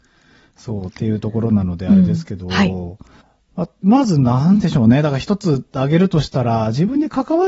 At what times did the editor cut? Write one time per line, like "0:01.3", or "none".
0:03.2

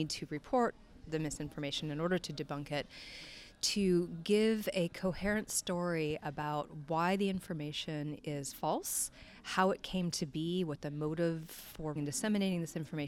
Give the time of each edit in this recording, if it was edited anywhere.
0:12.0

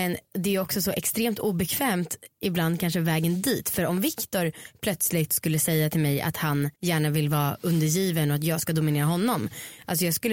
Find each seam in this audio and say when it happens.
0:06.7

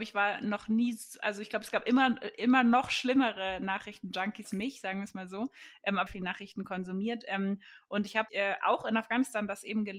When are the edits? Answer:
0:04.4
0:06.1
0:08.3

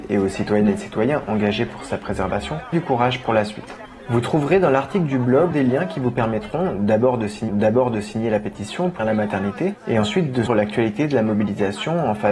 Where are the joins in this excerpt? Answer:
0:02.7
0:05.5
0:07.5
0:09.0
0:10.5

